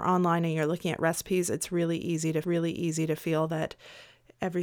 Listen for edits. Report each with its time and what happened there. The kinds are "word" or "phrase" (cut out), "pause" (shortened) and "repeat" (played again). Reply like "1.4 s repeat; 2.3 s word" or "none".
2.4 s repeat